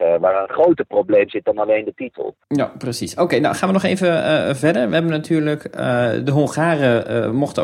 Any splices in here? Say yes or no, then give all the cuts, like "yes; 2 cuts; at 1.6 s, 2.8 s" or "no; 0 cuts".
yes; 1 cut; at 2.4 s